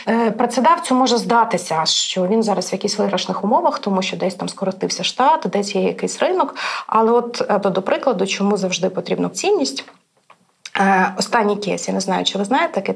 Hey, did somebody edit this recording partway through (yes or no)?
yes